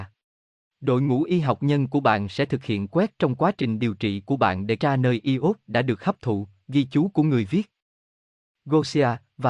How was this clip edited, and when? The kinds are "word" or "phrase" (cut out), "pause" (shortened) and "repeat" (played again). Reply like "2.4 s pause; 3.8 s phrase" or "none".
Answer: 1.6 s word; 4.8 s word